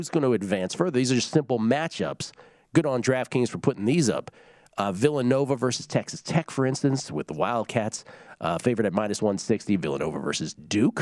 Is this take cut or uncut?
uncut